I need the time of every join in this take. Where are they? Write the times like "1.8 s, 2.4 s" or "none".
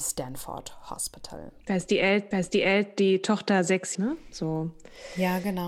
2.3 s, 3.9 s